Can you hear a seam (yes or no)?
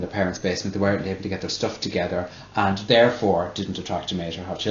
no